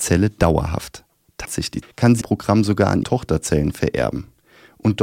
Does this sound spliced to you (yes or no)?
yes